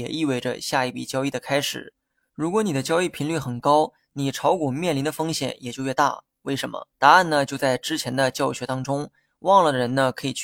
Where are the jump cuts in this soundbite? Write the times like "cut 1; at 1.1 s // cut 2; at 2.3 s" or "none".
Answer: cut 1; at 6.9 s

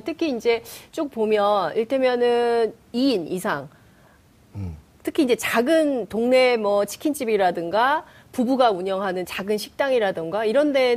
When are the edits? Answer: none

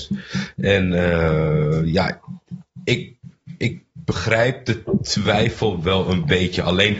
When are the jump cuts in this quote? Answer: none

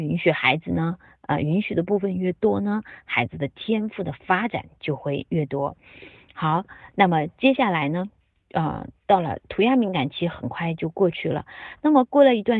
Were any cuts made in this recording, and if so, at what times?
none

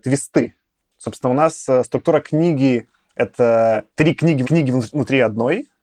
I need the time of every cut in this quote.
cut 1; at 3.9 s // cut 2; at 4.4 s

